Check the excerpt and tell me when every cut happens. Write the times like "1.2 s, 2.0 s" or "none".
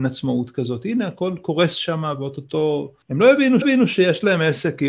3.0 s, 3.6 s